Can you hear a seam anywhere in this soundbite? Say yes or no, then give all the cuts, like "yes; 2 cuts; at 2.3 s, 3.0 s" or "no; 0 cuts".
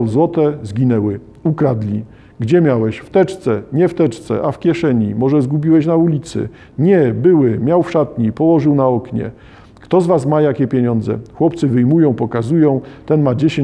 no; 0 cuts